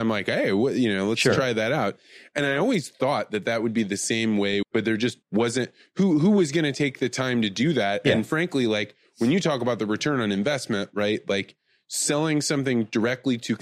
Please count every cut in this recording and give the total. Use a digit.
2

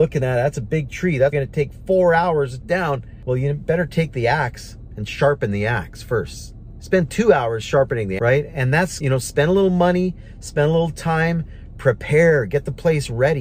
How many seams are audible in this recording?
4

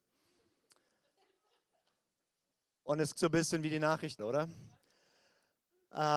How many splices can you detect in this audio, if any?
2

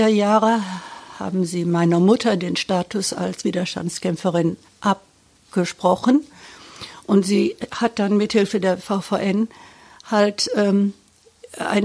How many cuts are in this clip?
0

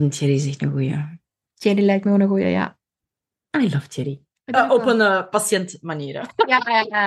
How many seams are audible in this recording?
0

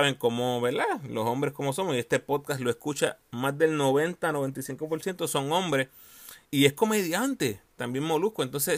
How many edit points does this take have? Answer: 1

